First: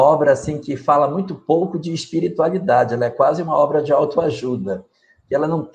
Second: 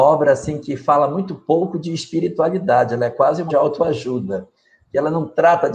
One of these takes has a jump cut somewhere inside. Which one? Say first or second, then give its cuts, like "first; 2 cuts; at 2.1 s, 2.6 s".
second; 1 cut; at 3.5 s